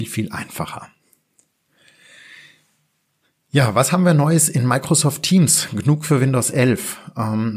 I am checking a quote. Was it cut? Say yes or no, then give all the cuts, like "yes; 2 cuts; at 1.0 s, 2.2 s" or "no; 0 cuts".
no; 0 cuts